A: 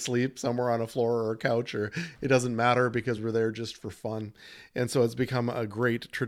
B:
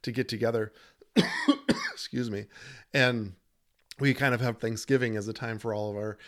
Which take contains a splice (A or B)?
B